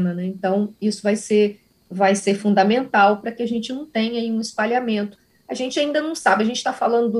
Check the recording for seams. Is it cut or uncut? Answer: uncut